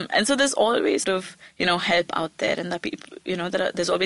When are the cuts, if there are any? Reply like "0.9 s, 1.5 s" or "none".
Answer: 1.0 s